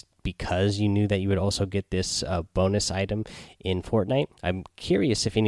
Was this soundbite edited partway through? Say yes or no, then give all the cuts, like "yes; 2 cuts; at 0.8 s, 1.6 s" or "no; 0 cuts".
yes; 1 cut; at 4.3 s